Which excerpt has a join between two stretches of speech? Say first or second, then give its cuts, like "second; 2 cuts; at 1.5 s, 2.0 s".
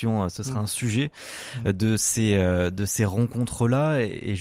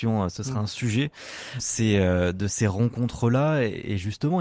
second; 1 cut; at 1.6 s